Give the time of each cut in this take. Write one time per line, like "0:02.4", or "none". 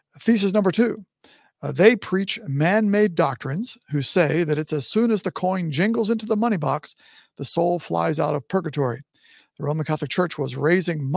none